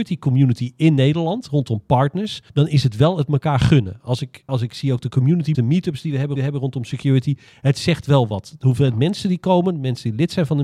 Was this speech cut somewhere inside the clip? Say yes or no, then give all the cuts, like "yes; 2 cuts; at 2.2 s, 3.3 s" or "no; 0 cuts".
yes; 4 cuts; at 2.5 s, 4.5 s, 5.5 s, 6.4 s